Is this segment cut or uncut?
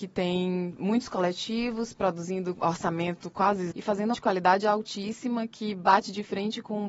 cut